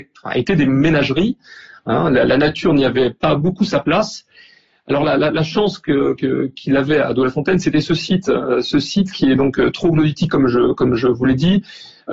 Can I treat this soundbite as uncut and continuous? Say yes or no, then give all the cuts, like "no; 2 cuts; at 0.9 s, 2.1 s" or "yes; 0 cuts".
yes; 0 cuts